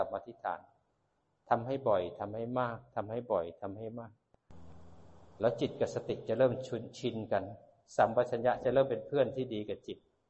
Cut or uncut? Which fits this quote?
uncut